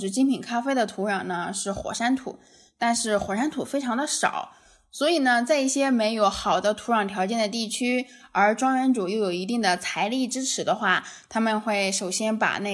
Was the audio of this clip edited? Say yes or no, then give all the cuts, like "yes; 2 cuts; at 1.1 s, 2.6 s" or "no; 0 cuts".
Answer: no; 0 cuts